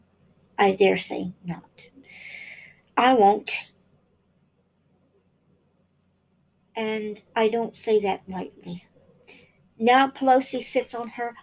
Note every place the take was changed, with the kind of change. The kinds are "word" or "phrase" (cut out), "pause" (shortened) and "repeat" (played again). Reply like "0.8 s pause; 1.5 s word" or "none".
7.3 s pause